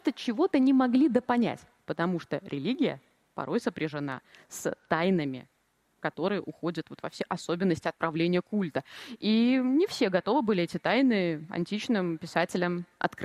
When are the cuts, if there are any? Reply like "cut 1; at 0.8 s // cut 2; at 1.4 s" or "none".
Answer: none

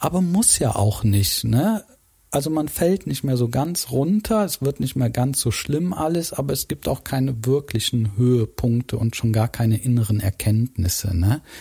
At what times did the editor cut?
none

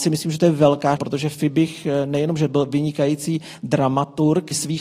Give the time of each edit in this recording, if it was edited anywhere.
cut 1; at 1.0 s

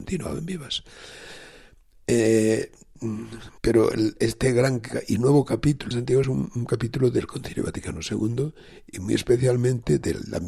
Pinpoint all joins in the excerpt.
cut 1; at 3.6 s // cut 2; at 5.9 s // cut 3; at 6.2 s

